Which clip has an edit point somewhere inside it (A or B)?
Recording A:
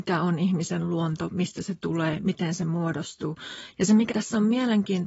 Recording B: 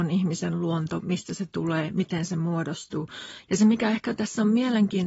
A